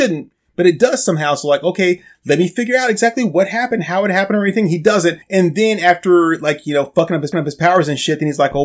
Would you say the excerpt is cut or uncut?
cut